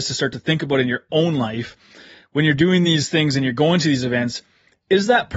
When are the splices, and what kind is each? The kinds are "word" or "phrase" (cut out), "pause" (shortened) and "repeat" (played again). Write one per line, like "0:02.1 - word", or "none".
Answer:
none